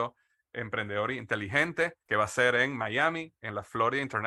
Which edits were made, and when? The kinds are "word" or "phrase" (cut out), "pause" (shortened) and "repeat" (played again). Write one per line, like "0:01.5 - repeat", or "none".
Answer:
0:02.0 - pause